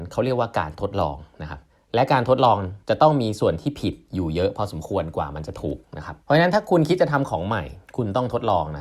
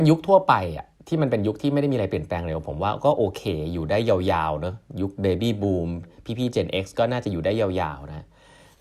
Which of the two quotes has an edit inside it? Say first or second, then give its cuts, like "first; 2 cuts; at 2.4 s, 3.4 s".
first; 5 cuts; at 1.7 s, 2.8 s, 5.8 s, 6.2 s, 7.9 s